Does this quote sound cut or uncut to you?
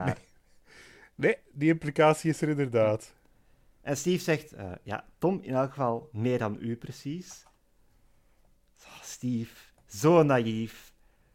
uncut